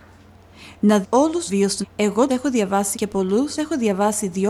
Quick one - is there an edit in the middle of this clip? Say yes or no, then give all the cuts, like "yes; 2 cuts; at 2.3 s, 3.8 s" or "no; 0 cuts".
yes; 6 cuts; at 1.0 s, 1.5 s, 1.8 s, 2.3 s, 2.9 s, 3.6 s